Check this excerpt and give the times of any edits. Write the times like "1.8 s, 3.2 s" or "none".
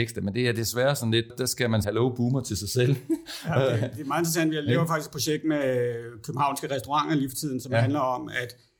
1.3 s, 1.8 s